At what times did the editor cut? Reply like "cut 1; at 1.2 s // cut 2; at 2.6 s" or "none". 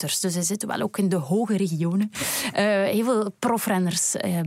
none